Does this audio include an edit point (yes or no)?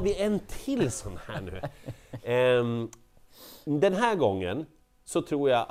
no